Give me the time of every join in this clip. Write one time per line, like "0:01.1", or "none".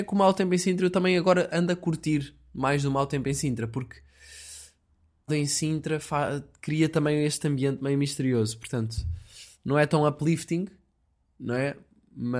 0:05.3

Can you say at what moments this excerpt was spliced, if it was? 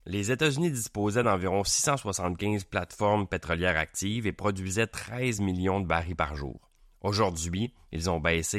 none

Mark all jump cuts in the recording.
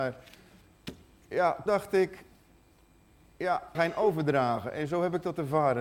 0:01.7
0:03.7

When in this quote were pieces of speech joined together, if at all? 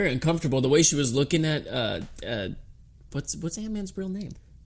none

